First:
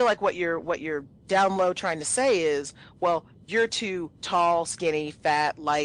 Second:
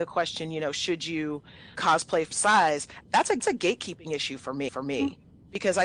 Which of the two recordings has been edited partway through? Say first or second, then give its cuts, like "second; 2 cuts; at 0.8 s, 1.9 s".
second; 4 cuts; at 1.8 s, 2.3 s, 3.4 s, 4.7 s